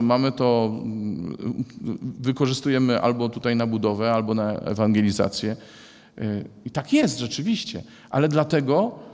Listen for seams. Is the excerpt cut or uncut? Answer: uncut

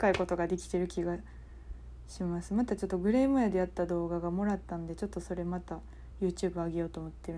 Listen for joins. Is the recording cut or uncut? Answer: uncut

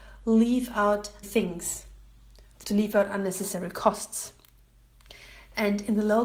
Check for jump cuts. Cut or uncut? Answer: cut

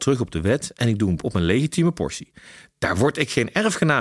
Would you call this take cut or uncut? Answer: cut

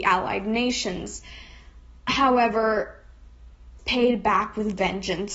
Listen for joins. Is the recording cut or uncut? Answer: cut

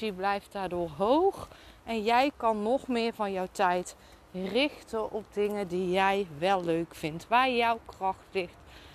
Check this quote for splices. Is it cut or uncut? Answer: uncut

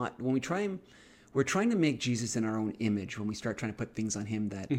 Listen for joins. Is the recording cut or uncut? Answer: uncut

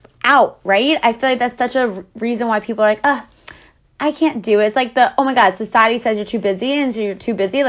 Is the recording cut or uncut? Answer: uncut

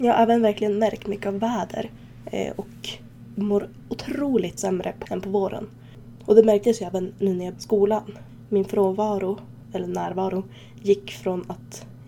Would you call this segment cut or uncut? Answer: cut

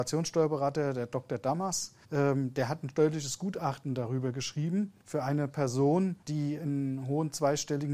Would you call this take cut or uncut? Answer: cut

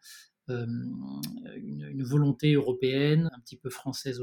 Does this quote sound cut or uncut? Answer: cut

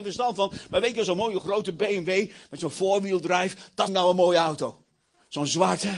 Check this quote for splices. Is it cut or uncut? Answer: cut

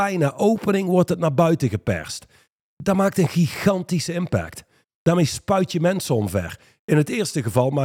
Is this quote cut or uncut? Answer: uncut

